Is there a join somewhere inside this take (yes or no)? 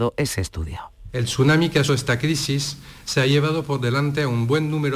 yes